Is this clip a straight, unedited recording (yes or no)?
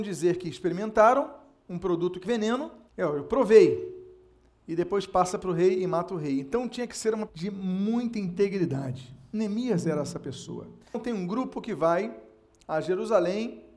no